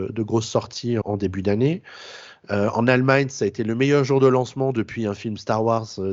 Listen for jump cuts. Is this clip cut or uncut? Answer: cut